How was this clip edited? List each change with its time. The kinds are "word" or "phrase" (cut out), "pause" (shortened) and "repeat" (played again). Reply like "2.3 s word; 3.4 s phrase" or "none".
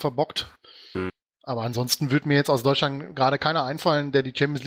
none